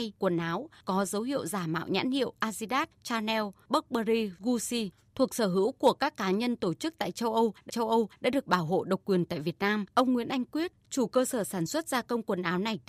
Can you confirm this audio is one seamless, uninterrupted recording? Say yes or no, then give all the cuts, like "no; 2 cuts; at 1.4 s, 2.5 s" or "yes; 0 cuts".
no; 2 cuts; at 7.7 s, 9.9 s